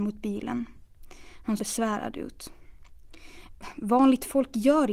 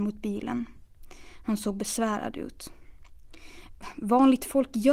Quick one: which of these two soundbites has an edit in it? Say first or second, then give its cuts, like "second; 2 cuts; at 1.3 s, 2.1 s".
first; 1 cut; at 1.6 s